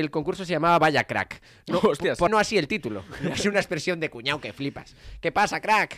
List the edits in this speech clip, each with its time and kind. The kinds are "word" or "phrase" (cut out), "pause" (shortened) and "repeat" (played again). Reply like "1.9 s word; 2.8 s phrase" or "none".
2.3 s word; 3.3 s word